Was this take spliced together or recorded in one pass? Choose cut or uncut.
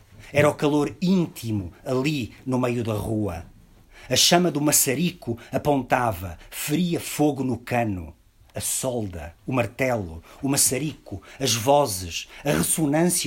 cut